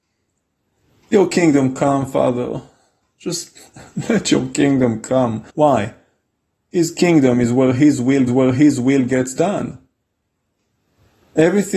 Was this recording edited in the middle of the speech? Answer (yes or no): yes